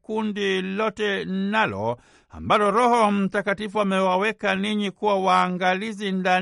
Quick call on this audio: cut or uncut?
uncut